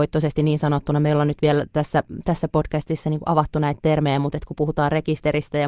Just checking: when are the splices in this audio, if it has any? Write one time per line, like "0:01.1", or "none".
none